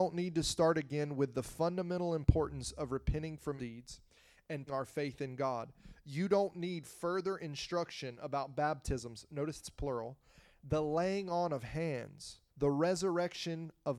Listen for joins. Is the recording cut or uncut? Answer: cut